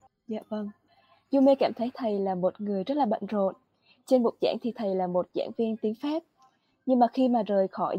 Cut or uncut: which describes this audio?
uncut